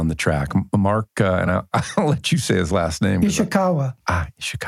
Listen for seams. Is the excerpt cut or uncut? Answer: uncut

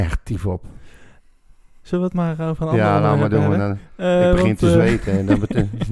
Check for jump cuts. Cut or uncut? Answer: uncut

